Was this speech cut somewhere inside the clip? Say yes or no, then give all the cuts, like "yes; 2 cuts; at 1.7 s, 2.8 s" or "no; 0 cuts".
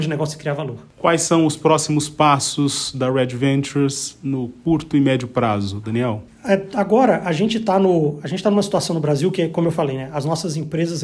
no; 0 cuts